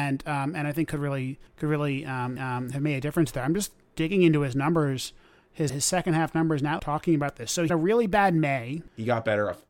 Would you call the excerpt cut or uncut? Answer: cut